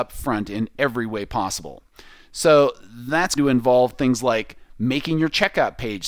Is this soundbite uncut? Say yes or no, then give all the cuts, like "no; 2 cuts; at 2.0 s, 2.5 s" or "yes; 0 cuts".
no; 1 cut; at 3.4 s